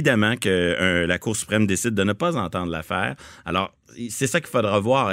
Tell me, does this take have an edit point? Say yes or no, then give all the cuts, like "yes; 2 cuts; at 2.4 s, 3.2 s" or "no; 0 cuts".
no; 0 cuts